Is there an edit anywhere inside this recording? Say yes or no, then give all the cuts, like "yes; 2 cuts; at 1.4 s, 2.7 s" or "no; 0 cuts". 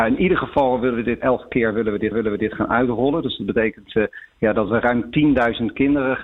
yes; 3 cuts; at 1.2 s, 2.1 s, 4.7 s